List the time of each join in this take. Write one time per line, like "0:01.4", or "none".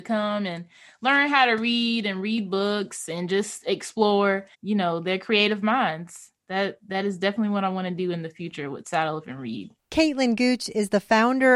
0:04.5
0:09.8